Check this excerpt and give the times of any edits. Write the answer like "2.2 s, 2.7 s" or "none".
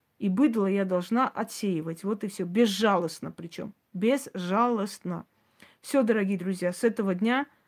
none

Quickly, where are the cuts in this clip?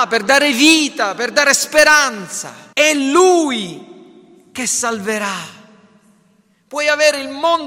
2.7 s

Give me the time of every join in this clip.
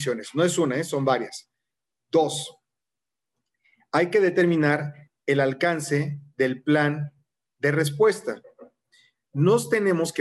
none

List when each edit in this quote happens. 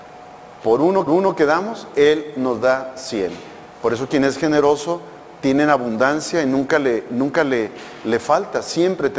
1.1 s, 3.7 s

